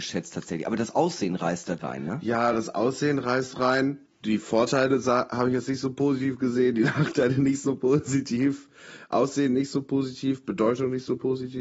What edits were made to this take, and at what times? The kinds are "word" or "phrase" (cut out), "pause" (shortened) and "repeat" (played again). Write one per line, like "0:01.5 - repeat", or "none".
0:01.8 - word